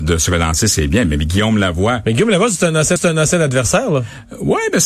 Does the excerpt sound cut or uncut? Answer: cut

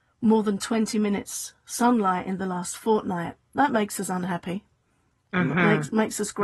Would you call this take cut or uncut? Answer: uncut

